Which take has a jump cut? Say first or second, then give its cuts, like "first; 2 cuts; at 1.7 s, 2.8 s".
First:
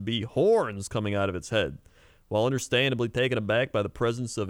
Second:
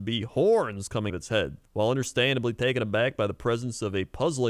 second; 2 cuts; at 1.1 s, 1.6 s